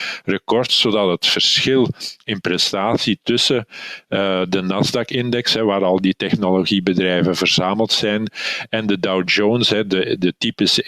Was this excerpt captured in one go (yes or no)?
yes